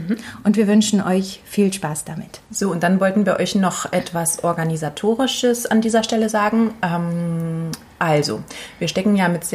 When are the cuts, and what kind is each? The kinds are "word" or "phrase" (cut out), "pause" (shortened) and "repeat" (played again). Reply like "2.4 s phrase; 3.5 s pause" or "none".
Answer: 2.4 s pause